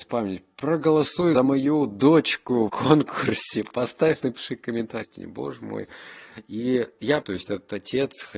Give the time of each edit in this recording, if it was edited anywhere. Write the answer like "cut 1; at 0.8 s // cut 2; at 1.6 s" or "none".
cut 1; at 1.3 s // cut 2; at 2.7 s // cut 3; at 4.2 s // cut 4; at 5.0 s // cut 5; at 7.2 s